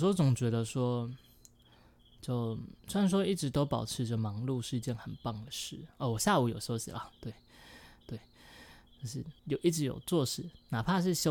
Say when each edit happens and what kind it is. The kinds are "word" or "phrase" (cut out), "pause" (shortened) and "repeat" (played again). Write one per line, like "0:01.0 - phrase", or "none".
0:02.8 - pause
0:08.0 - repeat
0:09.4 - pause